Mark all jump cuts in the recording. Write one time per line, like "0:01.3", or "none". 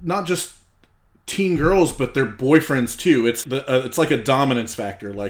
0:03.4